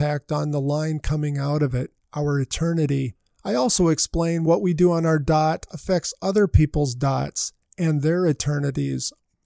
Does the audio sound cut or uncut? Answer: uncut